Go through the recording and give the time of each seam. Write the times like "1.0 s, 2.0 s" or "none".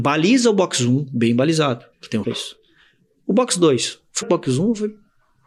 1.9 s, 2.2 s, 4.2 s